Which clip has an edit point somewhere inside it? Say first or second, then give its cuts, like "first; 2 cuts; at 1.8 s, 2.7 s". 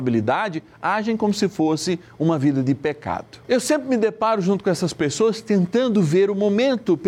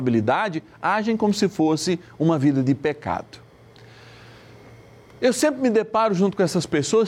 first; 1 cut; at 3.4 s